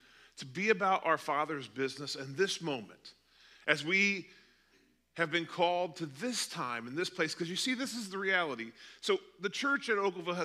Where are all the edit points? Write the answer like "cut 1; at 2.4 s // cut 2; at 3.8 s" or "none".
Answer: none